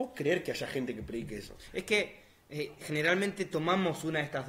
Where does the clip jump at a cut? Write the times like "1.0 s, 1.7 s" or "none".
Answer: none